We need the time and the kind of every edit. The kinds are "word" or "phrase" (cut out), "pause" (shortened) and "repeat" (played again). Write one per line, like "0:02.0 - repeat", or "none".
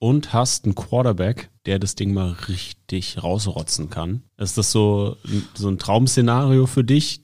0:01.6 - pause
0:04.3 - pause